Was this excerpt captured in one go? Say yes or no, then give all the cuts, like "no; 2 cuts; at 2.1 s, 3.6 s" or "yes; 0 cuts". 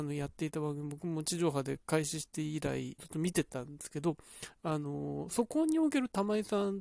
no; 1 cut; at 3.0 s